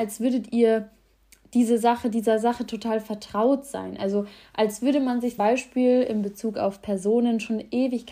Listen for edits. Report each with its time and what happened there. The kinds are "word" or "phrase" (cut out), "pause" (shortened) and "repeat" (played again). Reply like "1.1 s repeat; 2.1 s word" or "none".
5.4 s word